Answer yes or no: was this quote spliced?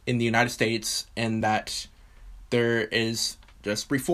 no